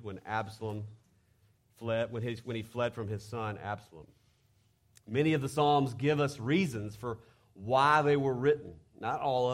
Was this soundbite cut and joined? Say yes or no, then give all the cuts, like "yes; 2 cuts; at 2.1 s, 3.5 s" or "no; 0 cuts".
no; 0 cuts